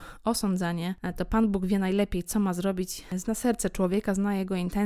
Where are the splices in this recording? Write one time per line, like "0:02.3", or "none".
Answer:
none